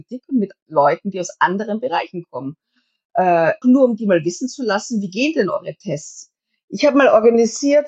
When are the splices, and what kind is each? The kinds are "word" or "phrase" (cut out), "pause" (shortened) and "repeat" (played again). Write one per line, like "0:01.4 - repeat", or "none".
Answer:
0:03.6 - word

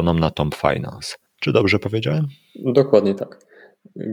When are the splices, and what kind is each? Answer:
0:01.3 - pause

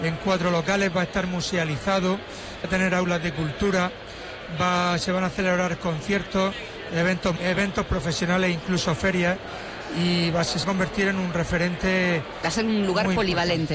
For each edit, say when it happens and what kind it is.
0:02.6 - word
0:07.4 - word
0:10.6 - word

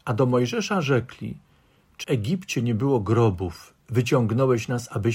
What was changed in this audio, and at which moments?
0:02.0 - phrase

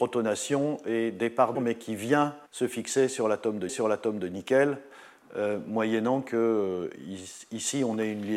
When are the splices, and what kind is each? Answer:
0:01.6 - phrase
0:02.5 - pause
0:03.7 - repeat

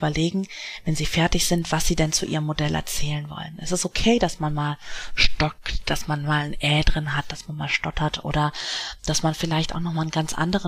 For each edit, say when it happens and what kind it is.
none

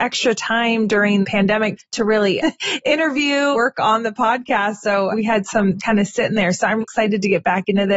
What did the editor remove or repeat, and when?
0:01.2 - word
0:01.8 - word
0:02.4 - word
0:03.5 - word
0:05.1 - word
0:05.8 - word
0:06.8 - word

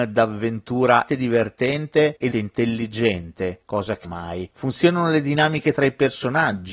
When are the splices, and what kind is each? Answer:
0:01.1 - word
0:02.3 - word
0:04.0 - phrase

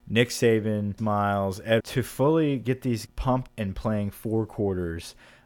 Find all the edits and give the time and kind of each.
0:01.0 - word
0:01.8 - word
0:03.1 - word
0:03.5 - word

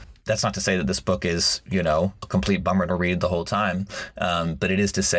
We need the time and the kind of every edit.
none

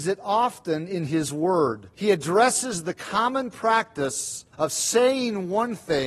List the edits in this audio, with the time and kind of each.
0:01.9 - pause
0:04.5 - pause

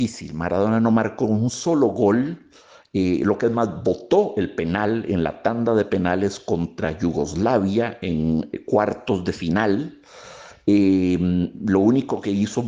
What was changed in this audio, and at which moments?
none

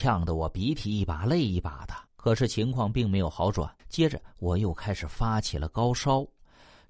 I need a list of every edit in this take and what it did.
0:02.1 - pause
0:03.8 - pause

